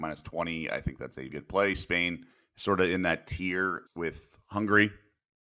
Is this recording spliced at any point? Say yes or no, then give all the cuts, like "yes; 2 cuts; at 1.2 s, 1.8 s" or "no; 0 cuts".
yes; 3 cuts; at 1.3 s, 2.3 s, 3.9 s